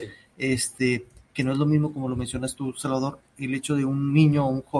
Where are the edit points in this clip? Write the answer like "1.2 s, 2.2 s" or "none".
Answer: none